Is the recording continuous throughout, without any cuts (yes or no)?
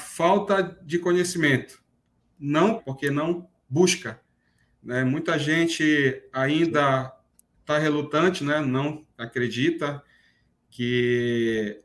no